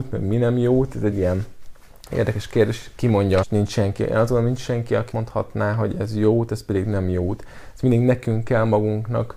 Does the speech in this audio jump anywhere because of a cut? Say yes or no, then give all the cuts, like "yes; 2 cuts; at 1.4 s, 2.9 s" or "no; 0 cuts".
yes; 3 cuts; at 1.1 s, 3.4 s, 5.1 s